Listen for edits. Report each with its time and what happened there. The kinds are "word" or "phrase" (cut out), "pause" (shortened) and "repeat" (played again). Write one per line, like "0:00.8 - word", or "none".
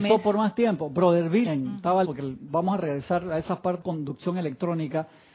0:01.5 - word
0:02.0 - word
0:02.4 - word
0:03.8 - word